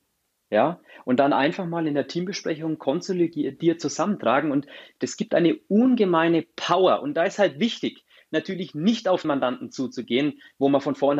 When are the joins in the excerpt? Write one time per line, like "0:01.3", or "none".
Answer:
0:09.2

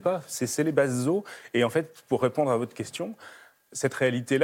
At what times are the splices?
none

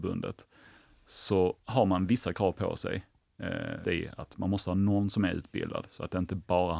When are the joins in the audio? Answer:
0:03.8

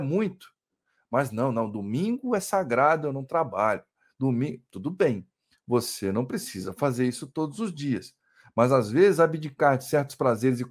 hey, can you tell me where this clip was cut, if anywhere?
none

